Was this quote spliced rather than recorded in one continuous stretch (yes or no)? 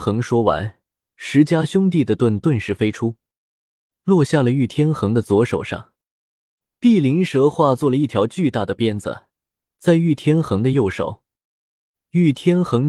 no